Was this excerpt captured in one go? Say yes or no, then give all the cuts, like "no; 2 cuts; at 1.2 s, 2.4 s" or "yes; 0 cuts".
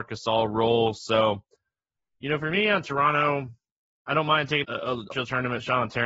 no; 2 cuts; at 4.6 s, 5.1 s